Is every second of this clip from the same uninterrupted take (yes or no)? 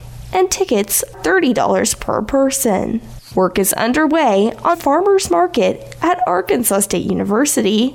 no